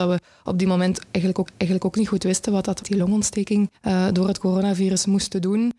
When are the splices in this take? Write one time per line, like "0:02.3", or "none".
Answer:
0:01.5
0:02.8
0:03.7

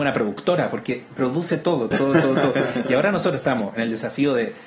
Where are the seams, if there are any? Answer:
0:01.9

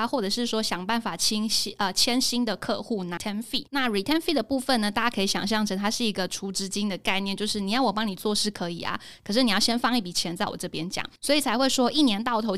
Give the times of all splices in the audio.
0:03.2
0:03.7
0:11.2

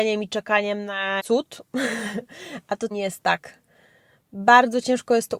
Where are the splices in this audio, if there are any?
0:01.2
0:02.9

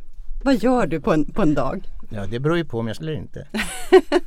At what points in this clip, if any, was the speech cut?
0:01.0
0:03.0

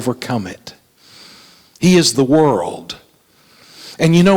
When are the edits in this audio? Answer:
0:02.1

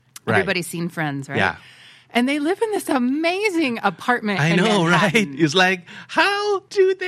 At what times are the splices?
none

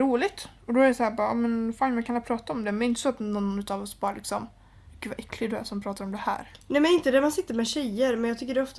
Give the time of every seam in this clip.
0:04.9

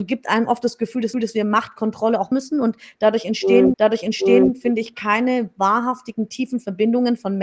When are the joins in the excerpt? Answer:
0:01.1
0:02.3
0:03.7

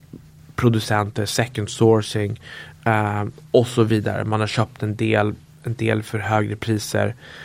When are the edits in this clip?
none

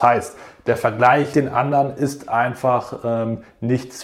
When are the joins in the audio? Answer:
0:01.3

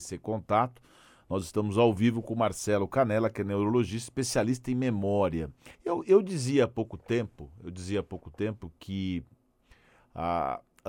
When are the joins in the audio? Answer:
0:05.7

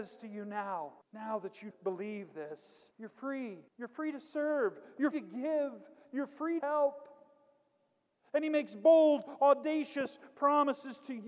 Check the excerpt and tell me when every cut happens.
0:01.0
0:01.7
0:02.9
0:03.7
0:05.1
0:06.6

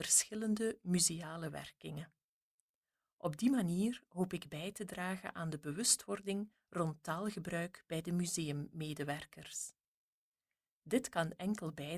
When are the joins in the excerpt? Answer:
none

